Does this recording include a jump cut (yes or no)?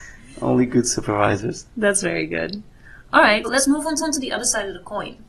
yes